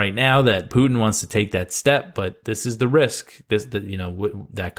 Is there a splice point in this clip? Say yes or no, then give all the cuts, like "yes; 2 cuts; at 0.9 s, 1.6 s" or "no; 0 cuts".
no; 0 cuts